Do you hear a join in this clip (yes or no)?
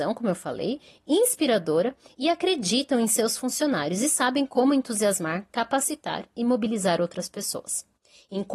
no